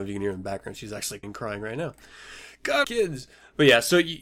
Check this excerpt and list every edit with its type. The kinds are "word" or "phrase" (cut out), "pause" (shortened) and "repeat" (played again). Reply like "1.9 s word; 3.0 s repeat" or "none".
1.2 s word; 2.8 s word